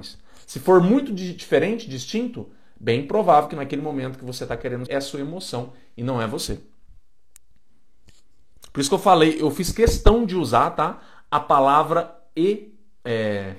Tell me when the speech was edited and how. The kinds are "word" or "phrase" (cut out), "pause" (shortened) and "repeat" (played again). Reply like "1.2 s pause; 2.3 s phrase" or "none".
4.9 s word